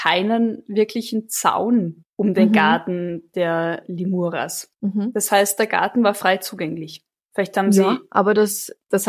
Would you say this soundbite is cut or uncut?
uncut